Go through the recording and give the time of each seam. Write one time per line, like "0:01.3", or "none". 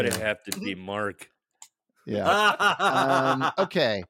none